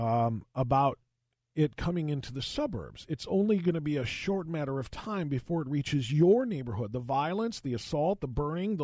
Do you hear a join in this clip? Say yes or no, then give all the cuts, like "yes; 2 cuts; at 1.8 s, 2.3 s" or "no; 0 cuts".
no; 0 cuts